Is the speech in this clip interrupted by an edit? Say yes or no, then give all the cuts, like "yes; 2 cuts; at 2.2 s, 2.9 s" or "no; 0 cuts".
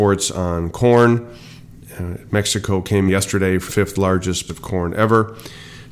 yes; 3 cuts; at 3.1 s, 3.7 s, 4.5 s